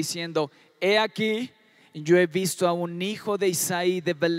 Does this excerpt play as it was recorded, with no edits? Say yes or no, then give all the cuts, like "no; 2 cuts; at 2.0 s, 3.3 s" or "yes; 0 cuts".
yes; 0 cuts